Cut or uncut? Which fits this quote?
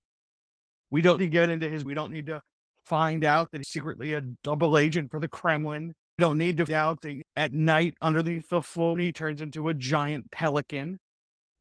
cut